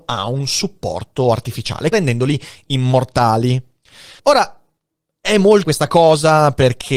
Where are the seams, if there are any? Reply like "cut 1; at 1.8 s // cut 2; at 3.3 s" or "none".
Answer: cut 1; at 1.9 s // cut 2; at 4.2 s // cut 3; at 5.6 s